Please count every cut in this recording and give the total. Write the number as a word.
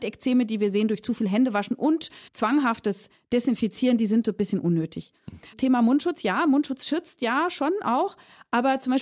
two